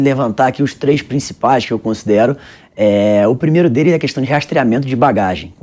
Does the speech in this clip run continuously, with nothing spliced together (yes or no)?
yes